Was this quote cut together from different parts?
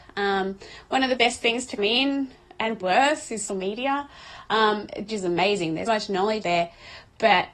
yes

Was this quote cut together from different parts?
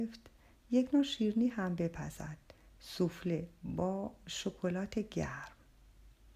no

